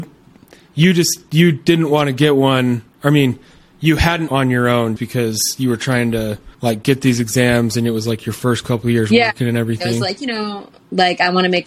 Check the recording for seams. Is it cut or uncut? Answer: cut